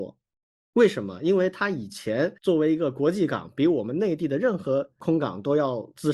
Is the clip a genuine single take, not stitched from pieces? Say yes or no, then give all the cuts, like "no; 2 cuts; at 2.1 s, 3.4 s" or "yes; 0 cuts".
no; 1 cut; at 2.4 s